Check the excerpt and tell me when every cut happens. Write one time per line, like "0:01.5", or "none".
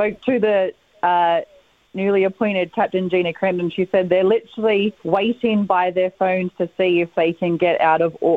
0:05.0